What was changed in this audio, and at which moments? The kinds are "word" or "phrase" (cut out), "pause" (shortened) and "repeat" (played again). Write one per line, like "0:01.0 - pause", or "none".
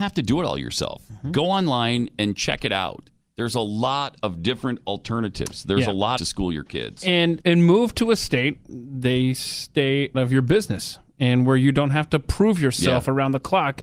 0:03.2 - pause
0:06.2 - phrase
0:07.4 - word
0:08.7 - word
0:10.1 - word